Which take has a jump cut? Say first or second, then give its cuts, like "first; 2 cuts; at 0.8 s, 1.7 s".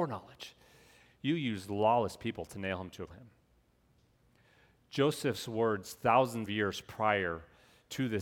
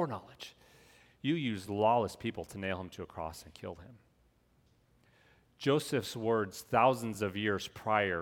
first; 2 cuts; at 3.1 s, 6.5 s